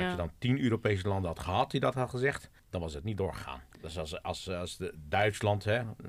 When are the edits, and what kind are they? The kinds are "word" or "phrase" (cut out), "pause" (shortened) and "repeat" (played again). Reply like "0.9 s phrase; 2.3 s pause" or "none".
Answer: 2.6 s pause; 3.7 s pause